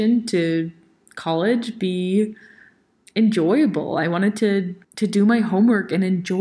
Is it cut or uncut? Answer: cut